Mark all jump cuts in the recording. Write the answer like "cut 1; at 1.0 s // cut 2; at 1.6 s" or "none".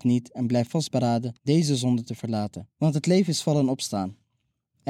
cut 1; at 1.4 s // cut 2; at 2.7 s